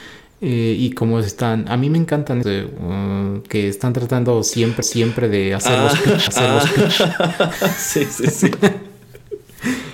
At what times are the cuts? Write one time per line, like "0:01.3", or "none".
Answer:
0:02.4
0:04.8
0:06.3